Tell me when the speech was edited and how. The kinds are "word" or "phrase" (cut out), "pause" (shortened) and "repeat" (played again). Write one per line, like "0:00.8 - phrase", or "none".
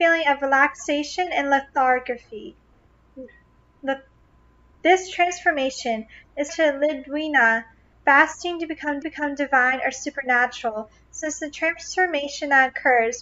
0:06.5 - word
0:09.0 - repeat